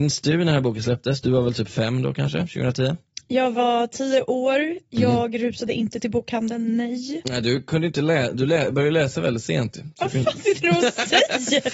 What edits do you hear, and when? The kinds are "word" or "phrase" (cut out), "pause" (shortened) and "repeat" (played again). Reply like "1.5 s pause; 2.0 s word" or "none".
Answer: none